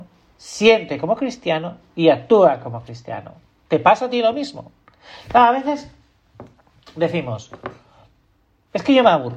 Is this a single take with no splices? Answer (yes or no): yes